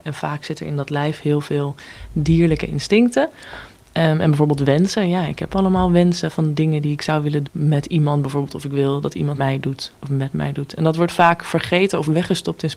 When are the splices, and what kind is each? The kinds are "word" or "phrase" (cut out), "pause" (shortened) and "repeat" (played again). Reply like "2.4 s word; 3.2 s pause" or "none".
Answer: 7.4 s word; 9.4 s word; 9.9 s pause